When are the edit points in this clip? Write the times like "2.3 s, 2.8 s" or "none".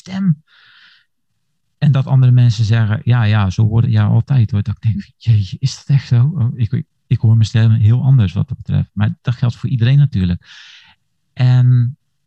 3.8 s